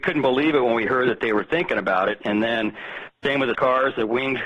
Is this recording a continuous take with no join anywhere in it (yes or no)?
no